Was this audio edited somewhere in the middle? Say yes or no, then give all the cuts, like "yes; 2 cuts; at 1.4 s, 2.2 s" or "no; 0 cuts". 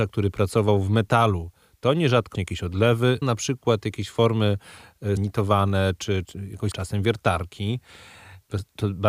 yes; 5 cuts; at 2.3 s, 3.2 s, 5.2 s, 6.2 s, 6.7 s